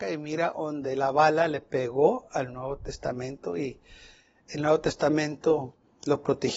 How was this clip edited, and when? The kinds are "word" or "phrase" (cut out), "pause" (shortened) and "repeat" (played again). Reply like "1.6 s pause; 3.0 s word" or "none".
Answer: none